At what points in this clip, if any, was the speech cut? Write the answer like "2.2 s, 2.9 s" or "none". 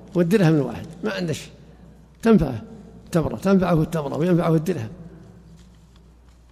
none